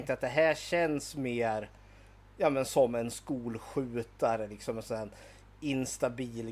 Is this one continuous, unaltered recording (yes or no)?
yes